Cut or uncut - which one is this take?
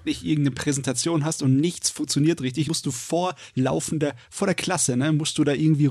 cut